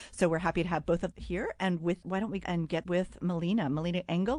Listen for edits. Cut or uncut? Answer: cut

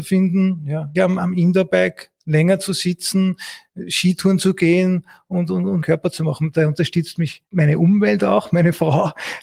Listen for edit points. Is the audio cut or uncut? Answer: cut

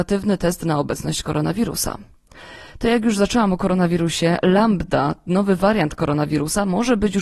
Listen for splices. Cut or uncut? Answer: uncut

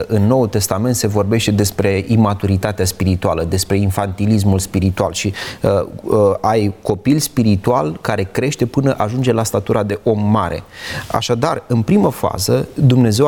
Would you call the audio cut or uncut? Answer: uncut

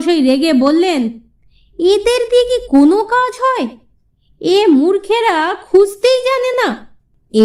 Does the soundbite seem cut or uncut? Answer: uncut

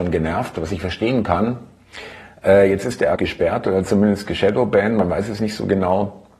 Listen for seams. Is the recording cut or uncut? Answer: cut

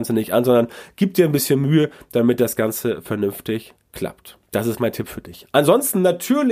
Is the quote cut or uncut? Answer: cut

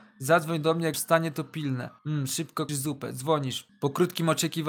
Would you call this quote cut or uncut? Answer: cut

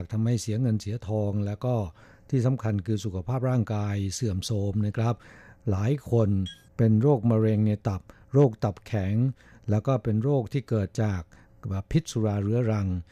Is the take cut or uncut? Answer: uncut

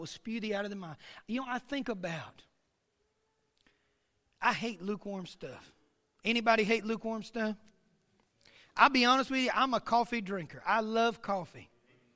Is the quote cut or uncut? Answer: uncut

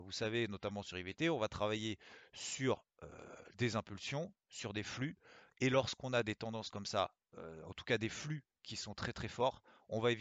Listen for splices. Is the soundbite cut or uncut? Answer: uncut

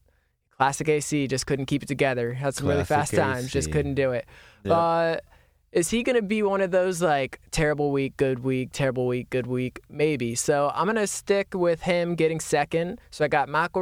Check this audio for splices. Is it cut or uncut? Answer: uncut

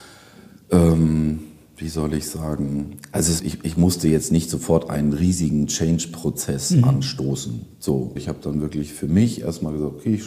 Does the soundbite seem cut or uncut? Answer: cut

